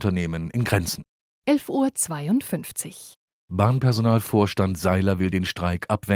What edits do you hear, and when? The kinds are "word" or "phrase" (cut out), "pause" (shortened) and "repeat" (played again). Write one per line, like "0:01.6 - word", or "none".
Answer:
none